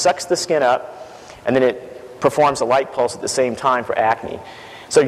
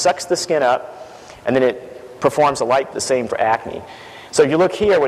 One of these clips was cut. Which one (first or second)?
second